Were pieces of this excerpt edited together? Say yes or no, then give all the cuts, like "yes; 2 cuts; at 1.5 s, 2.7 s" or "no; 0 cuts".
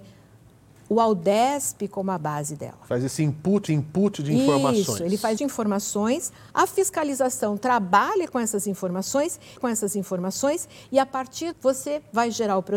yes; 5 cuts; at 3.7 s, 5.4 s, 6.5 s, 9.6 s, 11.5 s